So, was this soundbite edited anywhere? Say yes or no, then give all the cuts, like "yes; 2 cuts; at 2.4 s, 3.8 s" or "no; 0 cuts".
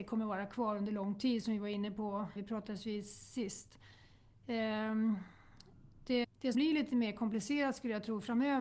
yes; 3 cuts; at 2.4 s, 6.2 s, 6.5 s